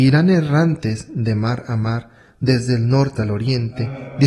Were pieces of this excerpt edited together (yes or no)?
yes